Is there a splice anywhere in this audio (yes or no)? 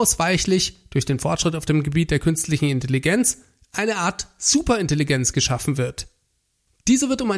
no